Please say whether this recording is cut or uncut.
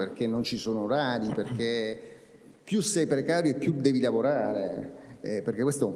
uncut